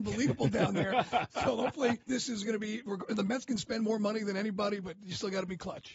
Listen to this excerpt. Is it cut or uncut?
cut